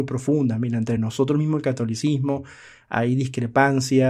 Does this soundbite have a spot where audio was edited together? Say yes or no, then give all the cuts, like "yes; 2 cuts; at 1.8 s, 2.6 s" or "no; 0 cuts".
no; 0 cuts